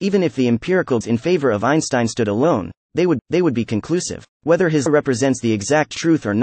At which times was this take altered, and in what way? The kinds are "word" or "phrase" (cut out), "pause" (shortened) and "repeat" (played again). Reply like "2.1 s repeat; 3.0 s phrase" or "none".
1.0 s word; 3.2 s repeat; 4.3 s pause; 4.9 s word